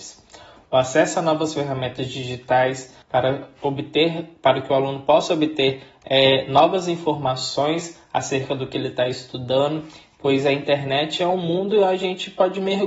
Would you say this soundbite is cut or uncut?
cut